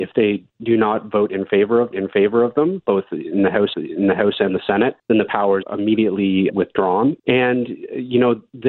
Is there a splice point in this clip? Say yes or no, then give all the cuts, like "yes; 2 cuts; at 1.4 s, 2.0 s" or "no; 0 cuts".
yes; 6 cuts; at 1.9 s, 3.7 s, 5.0 s, 5.6 s, 6.5 s, 7.2 s